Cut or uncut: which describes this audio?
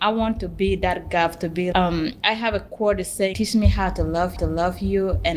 cut